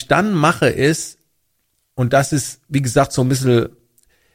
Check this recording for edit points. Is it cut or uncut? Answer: uncut